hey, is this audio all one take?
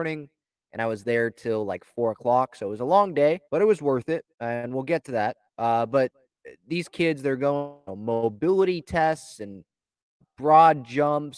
no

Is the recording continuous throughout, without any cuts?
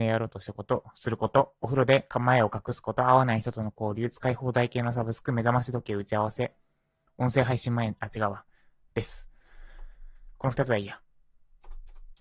yes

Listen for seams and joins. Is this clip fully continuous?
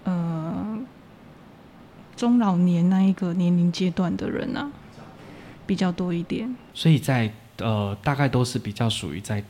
yes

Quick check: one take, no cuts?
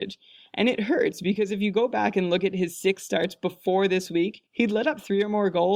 no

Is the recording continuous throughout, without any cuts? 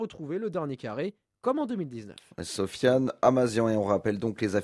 yes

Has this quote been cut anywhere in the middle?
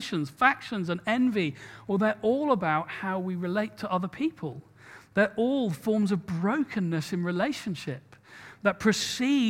no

